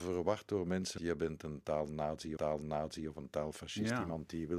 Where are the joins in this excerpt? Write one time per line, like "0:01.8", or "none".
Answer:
0:01.0
0:02.4